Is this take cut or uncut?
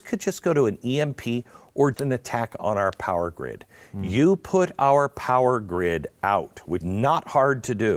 cut